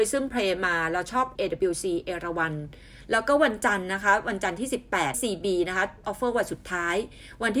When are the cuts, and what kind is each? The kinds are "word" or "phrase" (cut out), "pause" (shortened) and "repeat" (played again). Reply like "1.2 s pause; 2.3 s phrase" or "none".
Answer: 1.3 s word; 5.1 s phrase; 6.0 s word